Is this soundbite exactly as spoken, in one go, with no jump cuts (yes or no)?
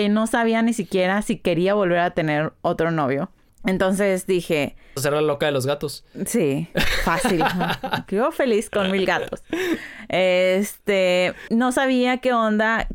no